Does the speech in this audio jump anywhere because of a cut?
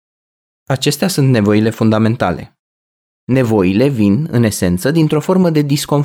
no; 0 cuts

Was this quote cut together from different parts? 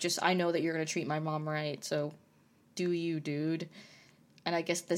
no; 0 cuts

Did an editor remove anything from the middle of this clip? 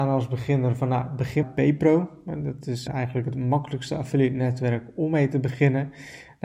yes; 2 cuts; at 1.4 s, 2.9 s

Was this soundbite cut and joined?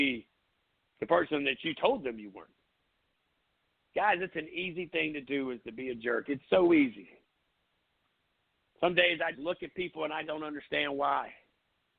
yes; 2 cuts; at 9.3 s, 10.2 s

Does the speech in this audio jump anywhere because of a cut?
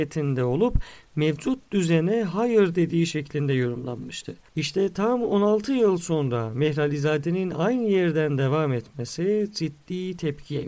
no; 0 cuts

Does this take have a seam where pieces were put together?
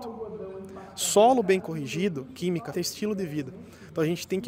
yes; 1 cut; at 2.7 s

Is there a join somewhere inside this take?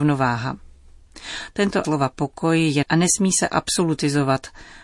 yes; 2 cuts; at 1.8 s, 2.8 s

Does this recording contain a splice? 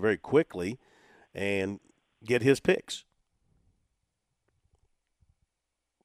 no; 0 cuts

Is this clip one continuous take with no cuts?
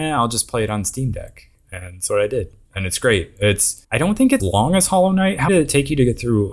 no; 4 cuts; at 2.1 s, 3.8 s, 4.4 s, 5.5 s

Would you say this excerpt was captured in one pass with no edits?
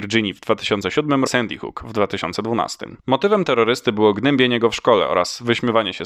no; 2 cuts; at 1.3 s, 3.0 s

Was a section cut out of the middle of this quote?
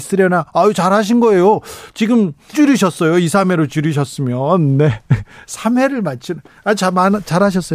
yes; 1 cut; at 2.5 s

